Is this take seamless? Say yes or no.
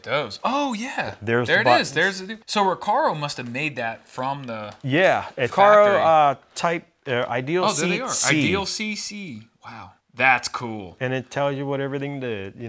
no